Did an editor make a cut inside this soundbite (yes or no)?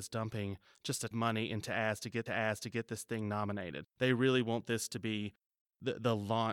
yes